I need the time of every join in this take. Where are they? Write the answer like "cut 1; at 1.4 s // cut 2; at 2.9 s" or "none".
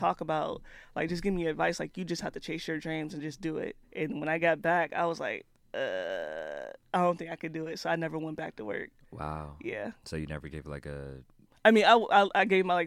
cut 1; at 3.8 s